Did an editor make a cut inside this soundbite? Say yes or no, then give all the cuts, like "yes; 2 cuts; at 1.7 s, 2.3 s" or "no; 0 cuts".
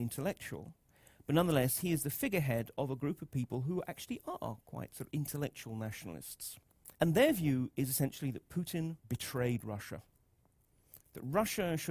yes; 2 cuts; at 6.9 s, 9.0 s